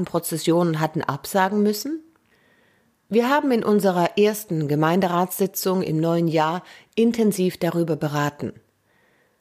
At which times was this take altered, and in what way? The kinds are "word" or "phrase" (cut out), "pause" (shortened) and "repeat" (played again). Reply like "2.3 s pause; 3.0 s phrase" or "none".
none

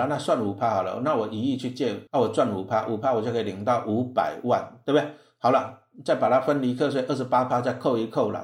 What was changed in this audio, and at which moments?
2.1 s pause

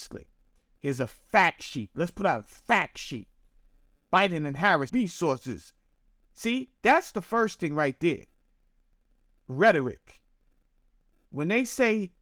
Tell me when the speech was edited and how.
4.9 s phrase; 6.8 s pause

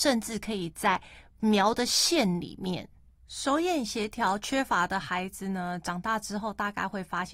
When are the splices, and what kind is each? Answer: none

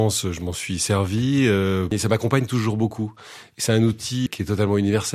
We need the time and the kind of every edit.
4.3 s word

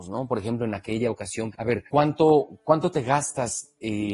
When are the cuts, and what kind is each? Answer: 1.5 s phrase; 1.9 s pause

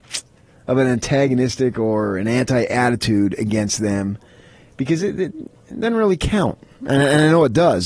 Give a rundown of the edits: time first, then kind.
none

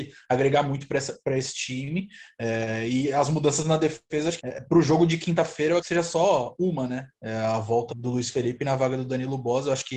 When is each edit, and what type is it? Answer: 4.4 s word; 5.8 s word; 7.9 s word

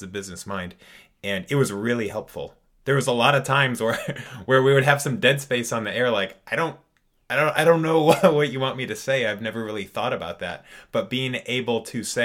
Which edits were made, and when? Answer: none

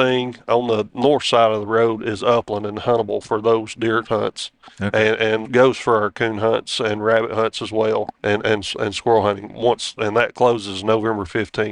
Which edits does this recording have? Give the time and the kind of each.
5.4 s word; 8.1 s pause

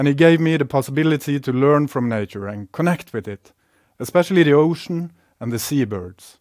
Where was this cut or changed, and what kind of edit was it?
none

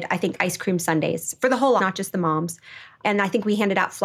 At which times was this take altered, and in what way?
1.8 s word

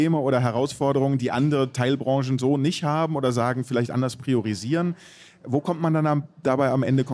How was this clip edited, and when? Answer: none

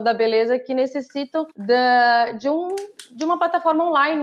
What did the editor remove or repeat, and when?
1.5 s pause

